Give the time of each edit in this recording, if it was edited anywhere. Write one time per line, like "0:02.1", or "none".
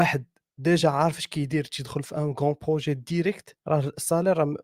0:03.6